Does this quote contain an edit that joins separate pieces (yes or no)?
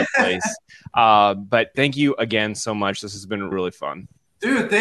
yes